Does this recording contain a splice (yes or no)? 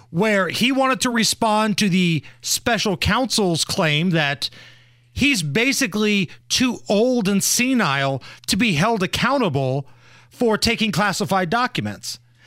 no